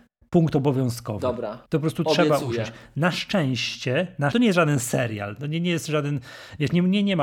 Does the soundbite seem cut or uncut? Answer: cut